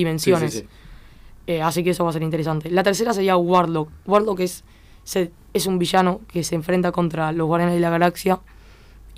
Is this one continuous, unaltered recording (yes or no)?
yes